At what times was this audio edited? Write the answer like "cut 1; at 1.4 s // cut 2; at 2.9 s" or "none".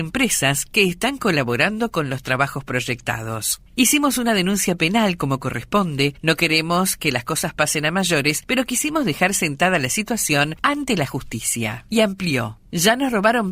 none